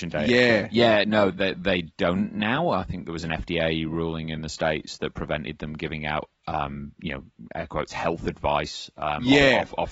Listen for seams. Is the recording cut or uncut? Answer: cut